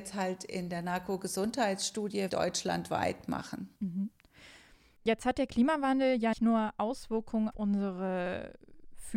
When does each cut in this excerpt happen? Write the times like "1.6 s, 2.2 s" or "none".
2.3 s, 3.8 s, 6.3 s, 7.5 s